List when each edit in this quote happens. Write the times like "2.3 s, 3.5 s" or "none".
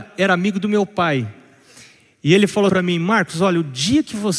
2.7 s